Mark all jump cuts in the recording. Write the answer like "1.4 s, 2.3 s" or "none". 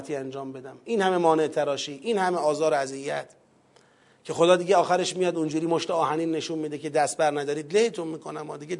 none